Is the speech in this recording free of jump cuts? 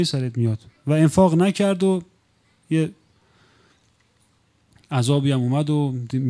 yes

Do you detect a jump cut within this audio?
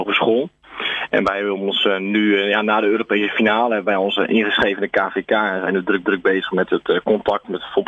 yes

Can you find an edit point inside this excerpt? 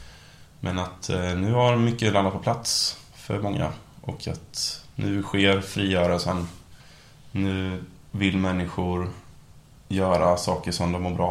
no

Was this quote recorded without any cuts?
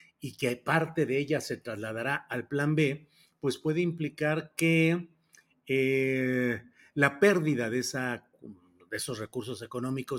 yes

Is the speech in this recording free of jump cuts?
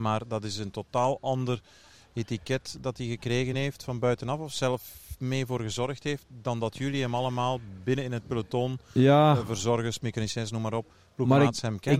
yes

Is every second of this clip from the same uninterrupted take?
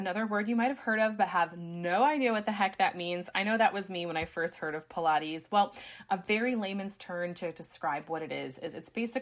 yes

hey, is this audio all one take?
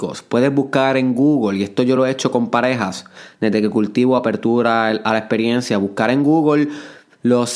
yes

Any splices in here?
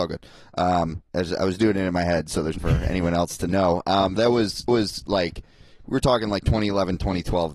yes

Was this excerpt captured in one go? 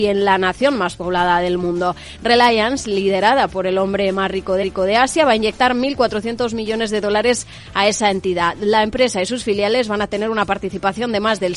no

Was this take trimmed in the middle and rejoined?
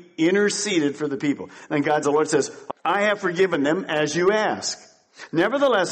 yes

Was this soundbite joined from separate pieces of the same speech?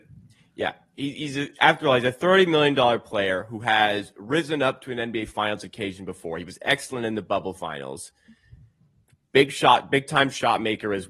no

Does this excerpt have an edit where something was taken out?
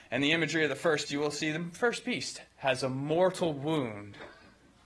yes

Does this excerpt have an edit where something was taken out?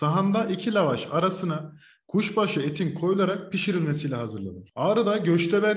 no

